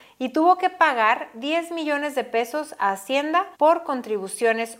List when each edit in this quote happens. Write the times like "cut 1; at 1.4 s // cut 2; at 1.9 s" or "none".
cut 1; at 3.5 s